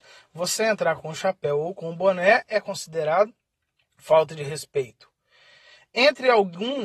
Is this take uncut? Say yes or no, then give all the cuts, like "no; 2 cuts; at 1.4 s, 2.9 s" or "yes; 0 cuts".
yes; 0 cuts